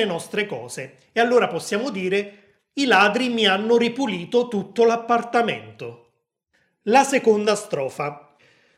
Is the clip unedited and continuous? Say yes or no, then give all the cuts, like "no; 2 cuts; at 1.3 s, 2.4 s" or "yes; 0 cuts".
yes; 0 cuts